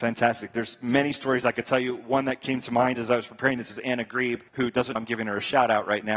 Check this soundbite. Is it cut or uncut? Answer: cut